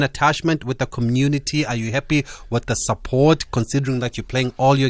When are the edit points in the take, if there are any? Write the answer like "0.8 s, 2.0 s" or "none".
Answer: none